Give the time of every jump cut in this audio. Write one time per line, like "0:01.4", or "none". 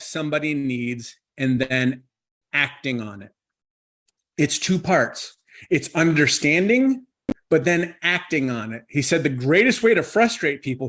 none